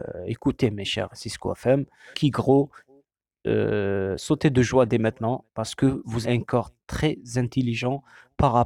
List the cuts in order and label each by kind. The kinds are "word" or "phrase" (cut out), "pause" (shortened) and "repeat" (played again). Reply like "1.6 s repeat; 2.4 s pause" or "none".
1.1 s word; 2.1 s word; 6.2 s word